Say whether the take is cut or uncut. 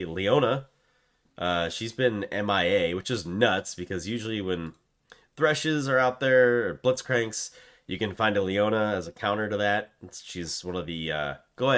uncut